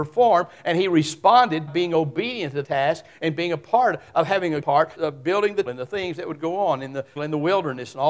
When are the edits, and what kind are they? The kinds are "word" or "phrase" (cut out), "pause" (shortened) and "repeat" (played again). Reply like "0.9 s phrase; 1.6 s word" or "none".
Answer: 1.7 s word; 2.6 s word; 4.6 s word; 4.9 s word; 5.7 s word; 7.2 s word